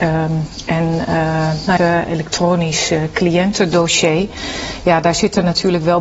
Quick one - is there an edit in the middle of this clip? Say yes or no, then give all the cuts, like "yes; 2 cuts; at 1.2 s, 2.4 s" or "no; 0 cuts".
yes; 1 cut; at 1.8 s